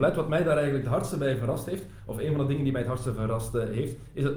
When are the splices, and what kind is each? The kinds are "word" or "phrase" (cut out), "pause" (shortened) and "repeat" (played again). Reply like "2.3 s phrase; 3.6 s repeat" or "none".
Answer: none